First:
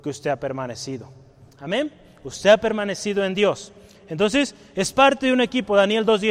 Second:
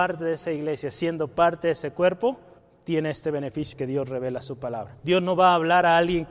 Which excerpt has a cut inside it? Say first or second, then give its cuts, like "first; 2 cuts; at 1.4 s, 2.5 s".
second; 3 cuts; at 2.6 s, 3.7 s, 5.0 s